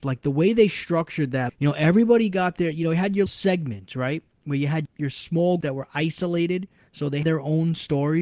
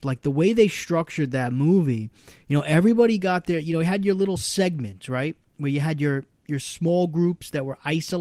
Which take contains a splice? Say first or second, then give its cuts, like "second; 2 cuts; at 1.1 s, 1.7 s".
first; 5 cuts; at 1.5 s, 3.3 s, 4.8 s, 5.6 s, 7.2 s